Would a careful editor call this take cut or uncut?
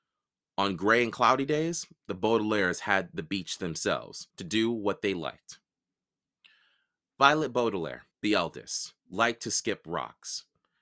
cut